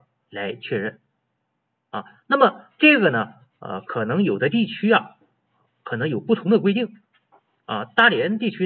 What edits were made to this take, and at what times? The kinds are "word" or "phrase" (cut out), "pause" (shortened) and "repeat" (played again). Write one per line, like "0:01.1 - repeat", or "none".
none

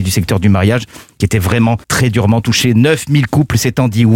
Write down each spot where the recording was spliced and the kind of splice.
0:01.8 - pause

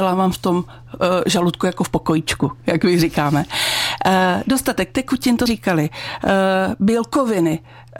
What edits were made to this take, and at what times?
0:05.5 - word

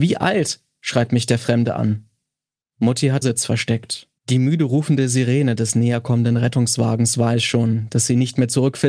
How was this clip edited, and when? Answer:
0:03.2 - phrase
0:04.2 - pause

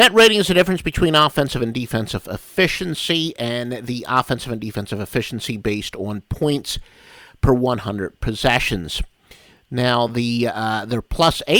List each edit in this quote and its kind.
none

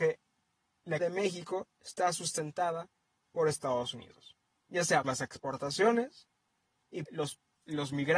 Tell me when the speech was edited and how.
0:01.0 - word
0:05.0 - word
0:07.1 - word

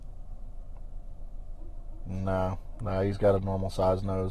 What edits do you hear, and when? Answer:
none

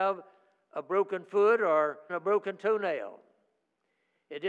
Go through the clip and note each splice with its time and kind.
0:02.1 - word

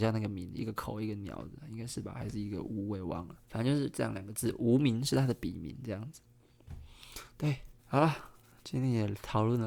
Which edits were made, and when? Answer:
0:03.4 - pause
0:07.8 - pause

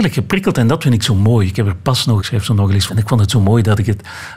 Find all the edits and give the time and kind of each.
0:02.2 - word
0:02.9 - phrase

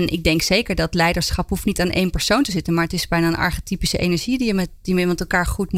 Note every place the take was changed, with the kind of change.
none

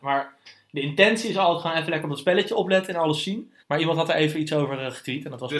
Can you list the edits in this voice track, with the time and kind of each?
0:03.6 - pause

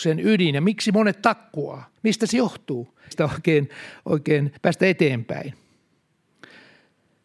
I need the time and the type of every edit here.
0:02.0 - pause
0:03.1 - word
0:04.6 - pause

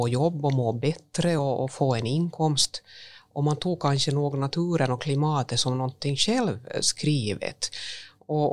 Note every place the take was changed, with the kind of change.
none

